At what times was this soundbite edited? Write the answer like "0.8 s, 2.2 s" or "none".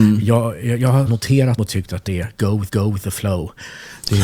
1.1 s, 1.6 s, 2.1 s, 2.7 s